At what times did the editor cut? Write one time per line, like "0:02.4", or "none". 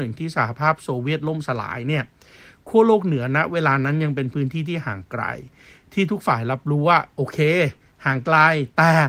none